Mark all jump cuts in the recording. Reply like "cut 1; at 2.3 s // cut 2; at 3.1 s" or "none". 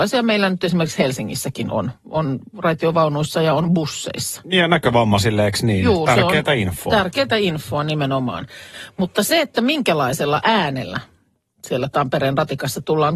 none

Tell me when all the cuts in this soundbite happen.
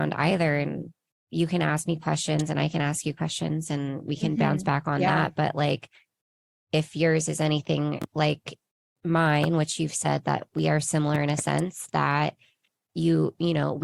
none

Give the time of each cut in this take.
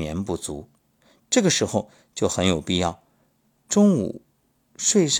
none

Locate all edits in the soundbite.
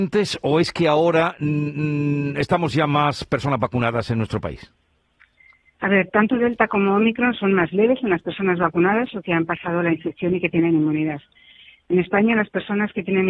none

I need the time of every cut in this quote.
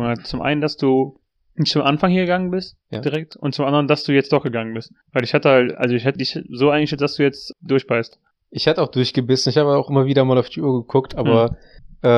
cut 1; at 2.8 s // cut 2; at 5.0 s // cut 3; at 6.2 s // cut 4; at 7.5 s

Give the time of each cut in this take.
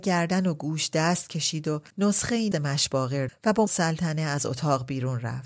cut 1; at 1.9 s // cut 2; at 2.5 s // cut 3; at 3.3 s // cut 4; at 3.7 s

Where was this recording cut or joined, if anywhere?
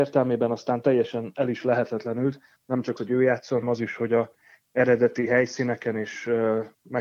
cut 1; at 3.0 s // cut 2; at 3.6 s

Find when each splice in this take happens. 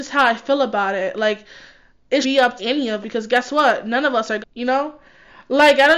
cut 1; at 2.2 s // cut 2; at 2.6 s // cut 3; at 3.0 s // cut 4; at 4.4 s

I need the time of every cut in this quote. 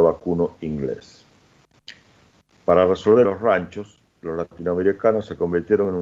cut 1; at 3.2 s

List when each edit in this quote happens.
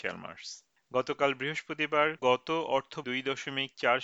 cut 1; at 2.2 s // cut 2; at 3.0 s

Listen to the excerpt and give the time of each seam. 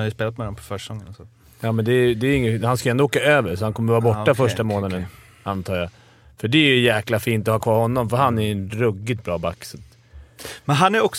none

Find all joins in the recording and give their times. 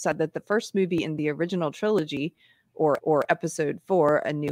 cut 1; at 3.0 s

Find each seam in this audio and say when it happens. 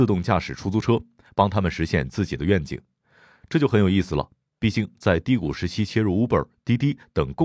none

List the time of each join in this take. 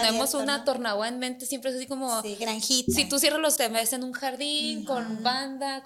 cut 1; at 3.6 s

